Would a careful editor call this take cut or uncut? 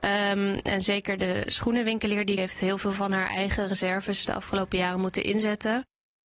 cut